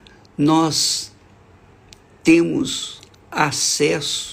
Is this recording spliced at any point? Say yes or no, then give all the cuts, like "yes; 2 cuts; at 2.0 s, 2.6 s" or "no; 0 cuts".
no; 0 cuts